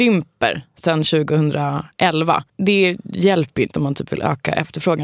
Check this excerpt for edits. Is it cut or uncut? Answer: cut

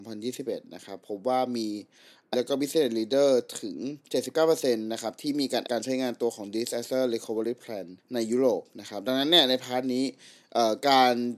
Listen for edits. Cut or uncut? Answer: cut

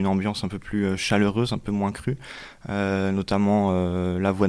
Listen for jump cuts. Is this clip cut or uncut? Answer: uncut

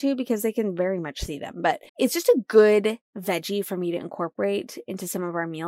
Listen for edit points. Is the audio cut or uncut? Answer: cut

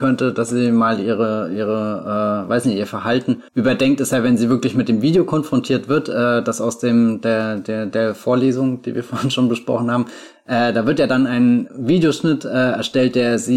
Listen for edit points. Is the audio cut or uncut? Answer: cut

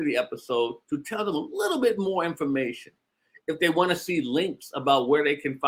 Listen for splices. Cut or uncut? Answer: uncut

